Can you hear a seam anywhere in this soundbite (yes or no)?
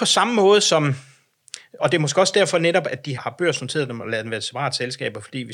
yes